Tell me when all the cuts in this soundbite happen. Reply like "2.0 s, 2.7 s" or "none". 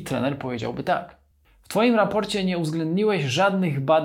none